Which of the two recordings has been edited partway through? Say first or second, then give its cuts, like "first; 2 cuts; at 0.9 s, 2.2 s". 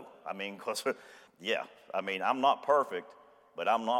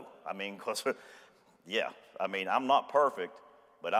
first; 1 cut; at 1.3 s